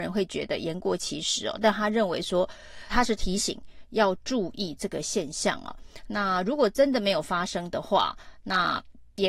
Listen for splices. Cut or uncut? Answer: cut